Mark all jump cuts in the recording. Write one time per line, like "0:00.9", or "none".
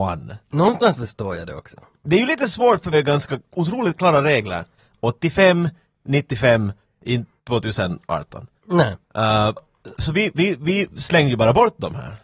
0:02.9
0:09.6
0:09.9